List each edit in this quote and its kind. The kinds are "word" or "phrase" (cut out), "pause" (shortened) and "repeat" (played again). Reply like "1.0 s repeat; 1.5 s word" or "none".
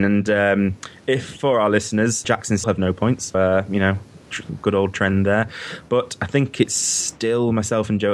2.2 s phrase; 2.6 s word; 3.3 s word